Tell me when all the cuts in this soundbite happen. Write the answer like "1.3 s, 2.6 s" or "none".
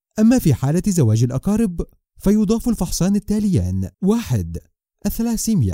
3.9 s